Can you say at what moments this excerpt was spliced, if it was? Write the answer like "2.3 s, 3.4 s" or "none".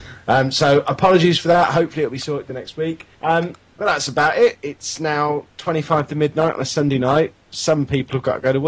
3.1 s